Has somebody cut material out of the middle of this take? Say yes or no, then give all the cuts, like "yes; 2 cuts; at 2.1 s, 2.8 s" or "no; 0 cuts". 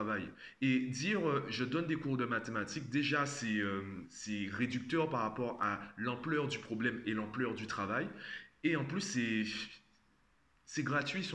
no; 0 cuts